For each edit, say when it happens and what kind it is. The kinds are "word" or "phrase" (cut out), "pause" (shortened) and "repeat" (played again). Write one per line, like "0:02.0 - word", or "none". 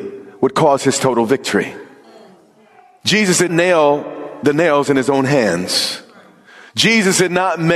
0:03.5 - word